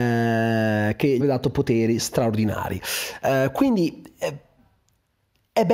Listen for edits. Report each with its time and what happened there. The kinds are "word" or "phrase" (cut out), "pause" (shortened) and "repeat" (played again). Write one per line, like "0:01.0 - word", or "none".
0:01.2 - word